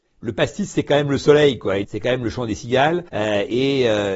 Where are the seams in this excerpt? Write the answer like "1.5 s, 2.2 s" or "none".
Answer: 1.8 s, 3.1 s